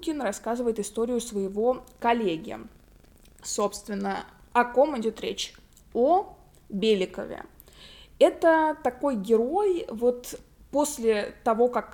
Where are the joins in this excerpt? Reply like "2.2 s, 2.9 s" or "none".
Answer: none